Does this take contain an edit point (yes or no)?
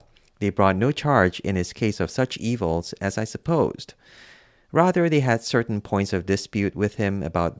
no